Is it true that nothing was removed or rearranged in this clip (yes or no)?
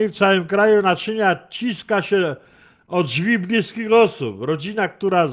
yes